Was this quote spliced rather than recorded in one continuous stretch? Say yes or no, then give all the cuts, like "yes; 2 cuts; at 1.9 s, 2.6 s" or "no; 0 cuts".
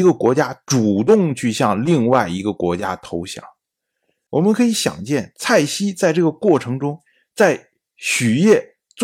no; 0 cuts